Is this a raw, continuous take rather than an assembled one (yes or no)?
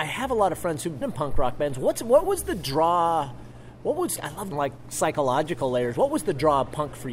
no